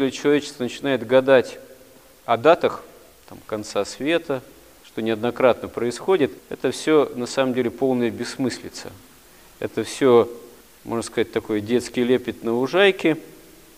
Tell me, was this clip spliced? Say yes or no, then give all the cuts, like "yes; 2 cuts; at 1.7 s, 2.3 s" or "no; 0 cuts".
no; 0 cuts